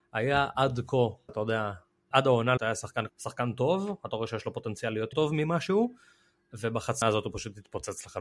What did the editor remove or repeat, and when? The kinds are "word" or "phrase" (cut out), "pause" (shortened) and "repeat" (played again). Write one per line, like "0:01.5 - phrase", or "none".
0:01.3 - word
0:02.1 - word
0:02.6 - word
0:03.1 - word
0:05.1 - word
0:07.0 - word